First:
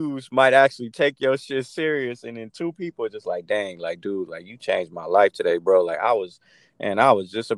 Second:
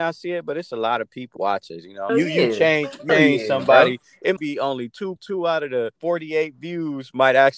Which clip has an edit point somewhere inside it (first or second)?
second